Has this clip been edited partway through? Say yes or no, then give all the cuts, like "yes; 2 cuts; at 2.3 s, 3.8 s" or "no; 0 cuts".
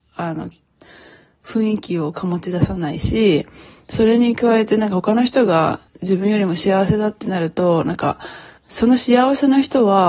yes; 2 cuts; at 5.9 s, 8.6 s